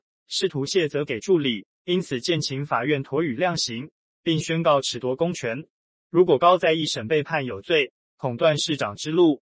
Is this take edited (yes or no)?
yes